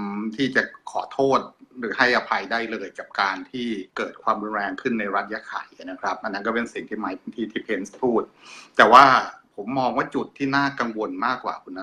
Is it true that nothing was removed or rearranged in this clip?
no; 1 cut; at 3.9 s

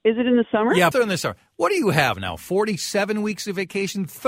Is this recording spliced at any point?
yes; 1 cut; at 0.9 s

